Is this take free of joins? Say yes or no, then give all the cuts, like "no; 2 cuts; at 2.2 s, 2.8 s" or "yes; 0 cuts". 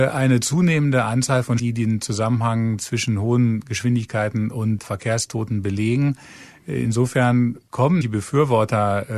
no; 2 cuts; at 1.6 s, 8.0 s